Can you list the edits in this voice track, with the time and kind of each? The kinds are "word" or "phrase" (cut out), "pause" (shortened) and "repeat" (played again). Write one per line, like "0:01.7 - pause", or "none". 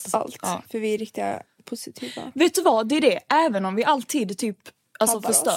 none